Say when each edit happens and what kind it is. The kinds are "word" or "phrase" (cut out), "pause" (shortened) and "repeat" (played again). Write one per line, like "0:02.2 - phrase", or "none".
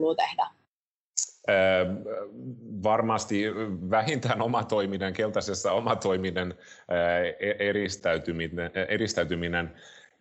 none